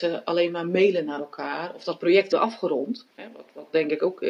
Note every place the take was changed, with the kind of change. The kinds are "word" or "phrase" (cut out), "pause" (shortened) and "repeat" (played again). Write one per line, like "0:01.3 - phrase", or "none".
0:02.3 - phrase
0:03.1 - pause